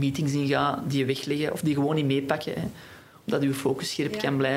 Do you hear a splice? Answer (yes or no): no